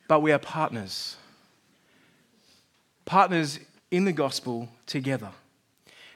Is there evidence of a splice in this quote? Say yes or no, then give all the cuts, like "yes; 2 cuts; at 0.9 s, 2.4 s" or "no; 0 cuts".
yes; 1 cut; at 3.8 s